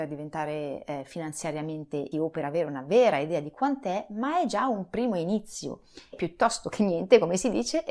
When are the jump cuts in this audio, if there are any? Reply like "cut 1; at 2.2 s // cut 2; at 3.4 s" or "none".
cut 1; at 2.1 s // cut 2; at 6.1 s